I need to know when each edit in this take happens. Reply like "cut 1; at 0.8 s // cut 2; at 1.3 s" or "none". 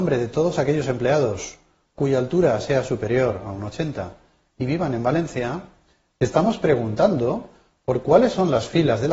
none